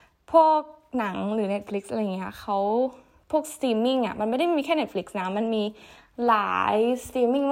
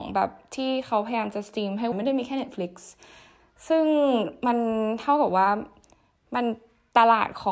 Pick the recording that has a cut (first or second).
second